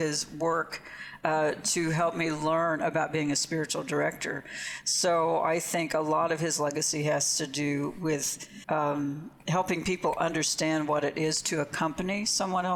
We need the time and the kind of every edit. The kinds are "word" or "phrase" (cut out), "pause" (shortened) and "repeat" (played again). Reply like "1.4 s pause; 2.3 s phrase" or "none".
8.6 s pause